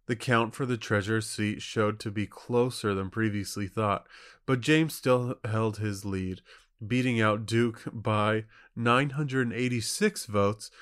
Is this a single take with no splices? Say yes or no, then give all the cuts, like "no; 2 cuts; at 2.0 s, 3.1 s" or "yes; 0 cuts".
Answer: yes; 0 cuts